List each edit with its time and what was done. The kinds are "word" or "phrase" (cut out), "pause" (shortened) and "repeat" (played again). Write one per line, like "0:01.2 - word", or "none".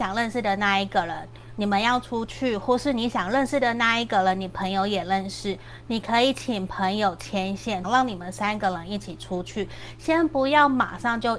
0:07.8 - phrase